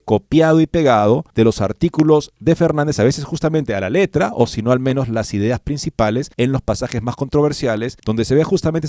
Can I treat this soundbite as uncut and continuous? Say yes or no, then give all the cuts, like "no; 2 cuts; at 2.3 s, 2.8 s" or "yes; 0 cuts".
no; 3 cuts; at 1.3 s, 6.3 s, 8.0 s